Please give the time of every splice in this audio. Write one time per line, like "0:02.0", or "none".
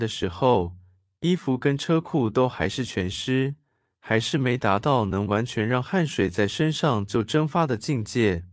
none